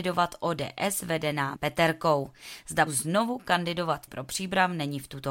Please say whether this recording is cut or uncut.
cut